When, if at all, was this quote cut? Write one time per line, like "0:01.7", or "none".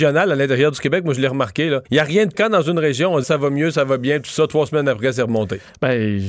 0:01.9
0:02.3
0:03.2